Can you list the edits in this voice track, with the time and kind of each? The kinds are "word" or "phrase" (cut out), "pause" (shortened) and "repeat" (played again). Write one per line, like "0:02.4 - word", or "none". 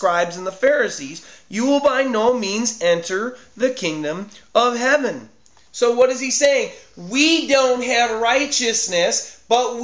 none